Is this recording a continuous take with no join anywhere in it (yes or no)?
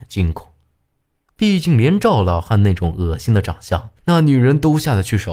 no